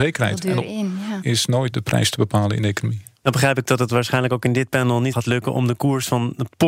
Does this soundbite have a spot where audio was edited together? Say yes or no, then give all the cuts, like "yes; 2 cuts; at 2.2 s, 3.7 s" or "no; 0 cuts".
yes; 3 cuts; at 1.2 s, 1.7 s, 5.1 s